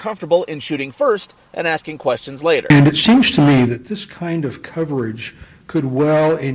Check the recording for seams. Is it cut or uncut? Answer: uncut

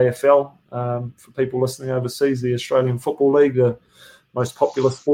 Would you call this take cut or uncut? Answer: uncut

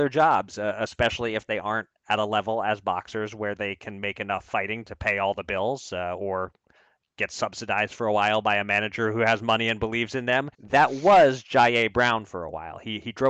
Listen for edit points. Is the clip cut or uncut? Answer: cut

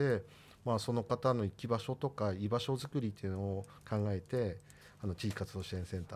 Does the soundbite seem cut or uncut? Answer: uncut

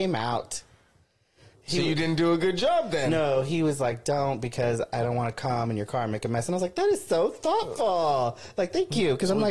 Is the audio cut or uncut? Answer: uncut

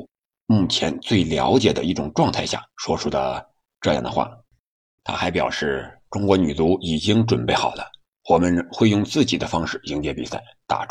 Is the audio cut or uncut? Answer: cut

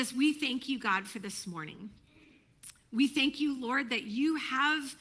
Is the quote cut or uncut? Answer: uncut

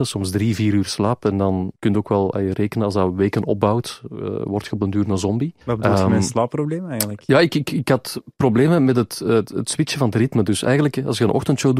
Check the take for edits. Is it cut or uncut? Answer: cut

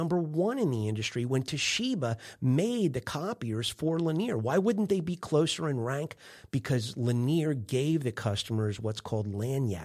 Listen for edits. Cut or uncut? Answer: uncut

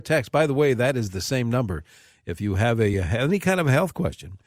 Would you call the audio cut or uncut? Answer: uncut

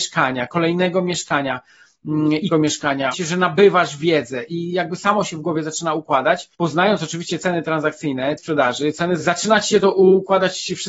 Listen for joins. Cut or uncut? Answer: cut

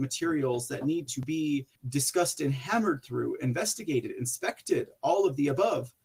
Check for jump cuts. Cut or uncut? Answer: cut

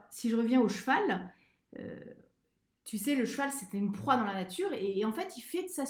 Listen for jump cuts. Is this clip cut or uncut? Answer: uncut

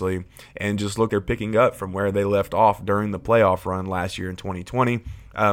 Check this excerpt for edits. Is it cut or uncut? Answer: cut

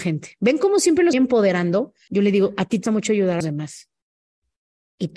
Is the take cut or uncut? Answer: cut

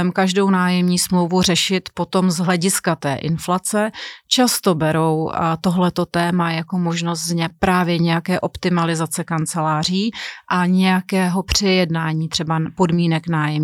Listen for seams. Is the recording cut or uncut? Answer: uncut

